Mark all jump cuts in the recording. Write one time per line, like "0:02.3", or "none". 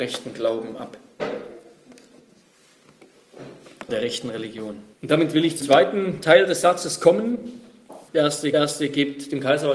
0:03.9
0:04.9
0:05.6
0:08.1
0:08.5